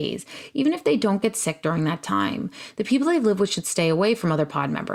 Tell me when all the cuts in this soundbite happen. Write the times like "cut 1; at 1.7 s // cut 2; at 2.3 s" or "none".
none